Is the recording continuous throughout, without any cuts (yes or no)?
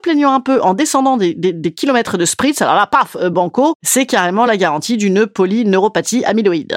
yes